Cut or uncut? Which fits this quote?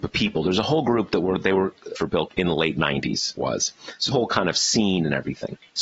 cut